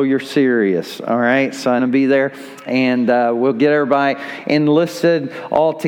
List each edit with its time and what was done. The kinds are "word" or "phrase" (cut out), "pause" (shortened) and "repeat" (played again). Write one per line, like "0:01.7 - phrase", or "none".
0:01.8 - phrase